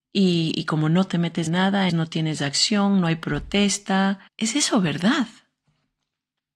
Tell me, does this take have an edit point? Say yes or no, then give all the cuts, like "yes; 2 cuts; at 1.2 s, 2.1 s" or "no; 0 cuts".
yes; 3 cuts; at 1.5 s, 1.9 s, 4.3 s